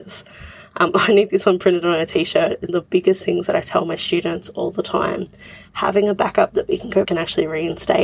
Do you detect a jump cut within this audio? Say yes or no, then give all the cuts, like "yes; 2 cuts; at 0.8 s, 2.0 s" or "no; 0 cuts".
yes; 2 cuts; at 2.7 s, 7.0 s